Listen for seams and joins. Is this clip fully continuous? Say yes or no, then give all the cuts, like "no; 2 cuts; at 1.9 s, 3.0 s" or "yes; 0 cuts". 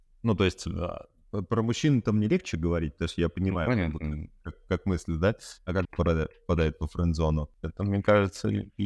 no; 1 cut; at 5.8 s